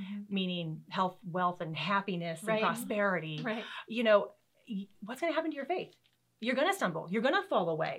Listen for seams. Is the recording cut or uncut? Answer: cut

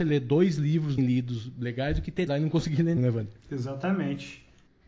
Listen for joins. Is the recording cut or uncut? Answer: cut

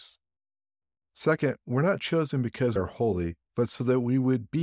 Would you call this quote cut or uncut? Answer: cut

